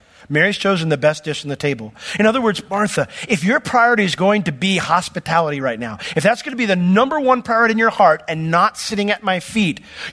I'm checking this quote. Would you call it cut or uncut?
uncut